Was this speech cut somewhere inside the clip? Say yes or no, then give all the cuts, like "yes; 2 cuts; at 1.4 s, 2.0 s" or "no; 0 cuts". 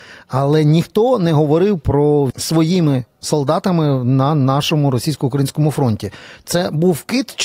yes; 1 cut; at 2.3 s